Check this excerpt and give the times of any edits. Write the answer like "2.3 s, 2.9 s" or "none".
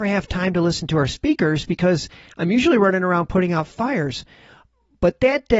none